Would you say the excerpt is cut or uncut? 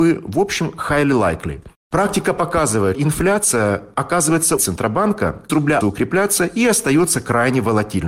cut